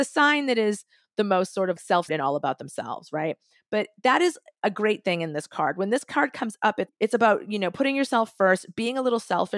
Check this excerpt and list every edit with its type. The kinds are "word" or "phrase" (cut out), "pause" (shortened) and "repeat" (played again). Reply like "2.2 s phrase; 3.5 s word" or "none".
1.8 s word; 2.1 s word; 6.9 s word